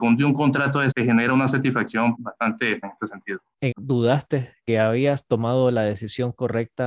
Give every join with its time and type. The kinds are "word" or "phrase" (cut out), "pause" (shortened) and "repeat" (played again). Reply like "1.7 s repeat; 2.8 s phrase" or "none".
0.9 s word; 2.1 s word; 2.8 s phrase; 3.7 s phrase; 4.7 s word